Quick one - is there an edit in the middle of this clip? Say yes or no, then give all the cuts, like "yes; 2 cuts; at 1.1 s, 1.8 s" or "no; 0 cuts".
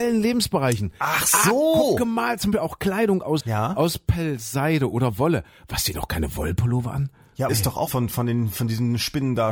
yes; 5 cuts; at 2.5 s, 3.4 s, 5.9 s, 7.5 s, 7.9 s